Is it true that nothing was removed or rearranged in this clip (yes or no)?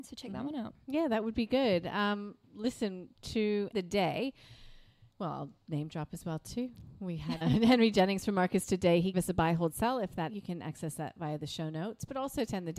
no